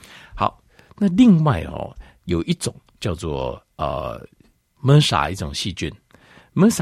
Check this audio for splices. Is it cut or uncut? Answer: cut